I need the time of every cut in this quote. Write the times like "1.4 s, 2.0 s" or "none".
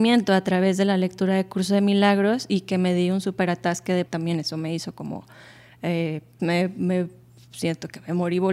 4.1 s, 6.4 s